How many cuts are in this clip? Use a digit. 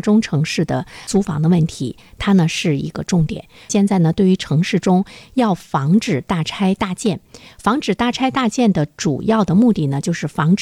0